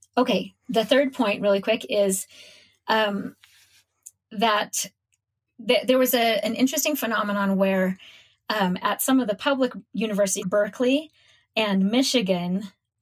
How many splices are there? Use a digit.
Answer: 1